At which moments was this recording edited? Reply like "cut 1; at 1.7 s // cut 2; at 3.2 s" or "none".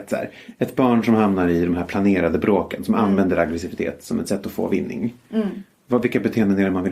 none